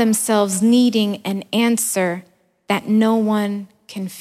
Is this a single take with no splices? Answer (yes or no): yes